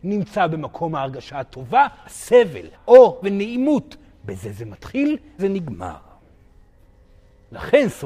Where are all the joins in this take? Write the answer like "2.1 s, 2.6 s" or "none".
2.0 s, 2.7 s, 3.2 s, 5.4 s